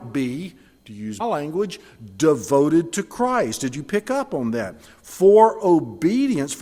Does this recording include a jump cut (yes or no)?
yes